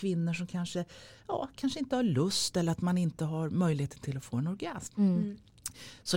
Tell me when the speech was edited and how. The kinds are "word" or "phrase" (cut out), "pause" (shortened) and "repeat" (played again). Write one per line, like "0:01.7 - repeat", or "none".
none

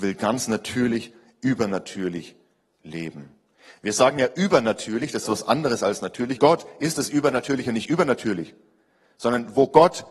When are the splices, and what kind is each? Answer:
0:05.2 - word
0:06.4 - phrase

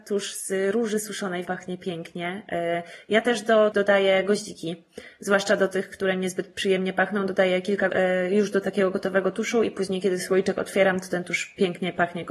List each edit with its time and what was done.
0:01.4 - word
0:03.7 - word
0:07.9 - word

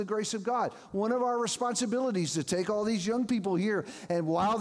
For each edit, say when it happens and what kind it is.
none

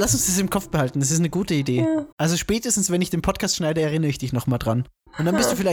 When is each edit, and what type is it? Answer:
0:02.1 - pause

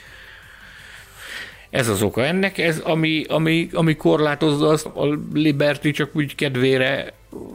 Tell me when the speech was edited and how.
0:04.9 - phrase

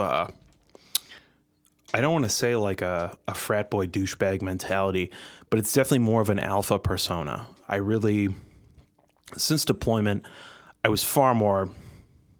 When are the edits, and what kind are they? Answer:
none

